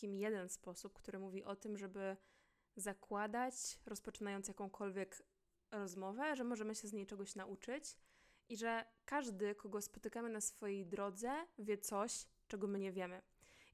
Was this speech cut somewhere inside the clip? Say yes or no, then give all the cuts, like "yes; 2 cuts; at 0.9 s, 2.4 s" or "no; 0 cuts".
no; 0 cuts